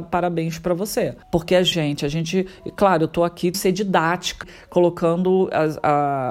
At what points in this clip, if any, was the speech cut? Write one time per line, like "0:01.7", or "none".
0:01.2
0:01.7
0:03.5
0:04.4